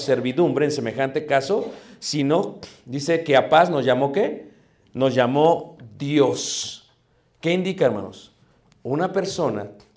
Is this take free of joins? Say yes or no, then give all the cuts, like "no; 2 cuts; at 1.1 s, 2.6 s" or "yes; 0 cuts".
yes; 0 cuts